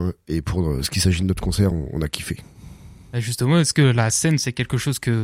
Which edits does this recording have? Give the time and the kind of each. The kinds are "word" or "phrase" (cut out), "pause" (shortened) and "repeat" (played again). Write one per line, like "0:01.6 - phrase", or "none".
none